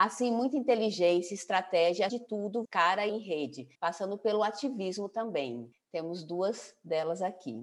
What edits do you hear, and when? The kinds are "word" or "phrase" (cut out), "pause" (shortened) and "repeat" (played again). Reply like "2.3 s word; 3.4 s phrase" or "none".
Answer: 2.1 s word; 2.6 s word; 3.1 s word; 3.7 s pause; 5.7 s pause